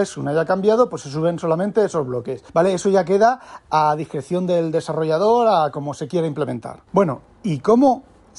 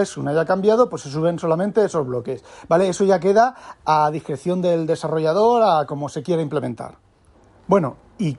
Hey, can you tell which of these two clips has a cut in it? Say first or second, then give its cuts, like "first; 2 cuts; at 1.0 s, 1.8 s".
first; 2 cuts; at 2.5 s, 6.9 s